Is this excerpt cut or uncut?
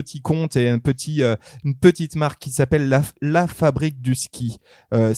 uncut